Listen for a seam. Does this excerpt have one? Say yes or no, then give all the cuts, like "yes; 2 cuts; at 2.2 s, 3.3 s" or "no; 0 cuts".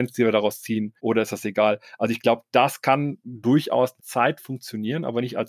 yes; 2 cuts; at 1.0 s, 4.0 s